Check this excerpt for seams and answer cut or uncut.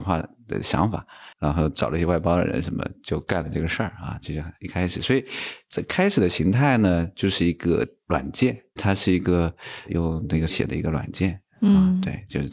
cut